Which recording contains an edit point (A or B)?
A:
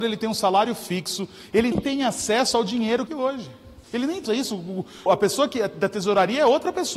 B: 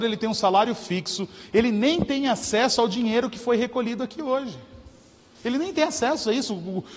A